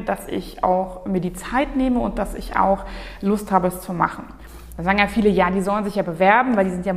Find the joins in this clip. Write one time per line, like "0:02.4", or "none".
none